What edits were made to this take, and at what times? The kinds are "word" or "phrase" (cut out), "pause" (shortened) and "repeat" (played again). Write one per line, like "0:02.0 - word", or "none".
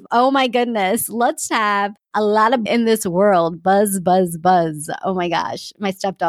0:01.5 - word
0:02.7 - phrase